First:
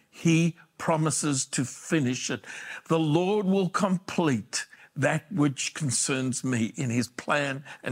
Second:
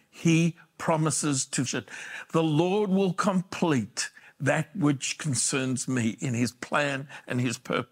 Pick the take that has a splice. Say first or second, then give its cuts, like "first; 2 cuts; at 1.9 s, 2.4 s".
second; 1 cut; at 1.7 s